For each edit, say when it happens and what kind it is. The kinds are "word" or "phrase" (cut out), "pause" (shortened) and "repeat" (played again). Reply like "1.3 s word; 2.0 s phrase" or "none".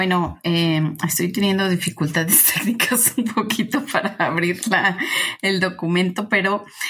none